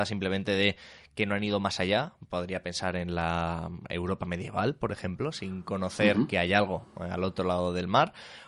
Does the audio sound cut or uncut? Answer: uncut